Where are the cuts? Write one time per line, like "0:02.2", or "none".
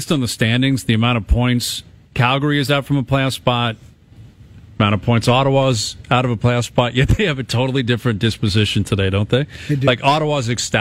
none